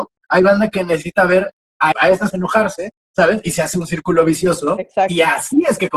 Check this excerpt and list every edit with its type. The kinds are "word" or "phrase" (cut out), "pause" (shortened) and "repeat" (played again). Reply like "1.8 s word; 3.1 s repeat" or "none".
1.9 s word; 2.3 s word